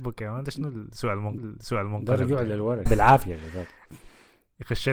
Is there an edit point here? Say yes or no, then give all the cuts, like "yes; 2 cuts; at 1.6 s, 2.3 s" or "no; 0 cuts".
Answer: yes; 2 cuts; at 1.4 s, 2.9 s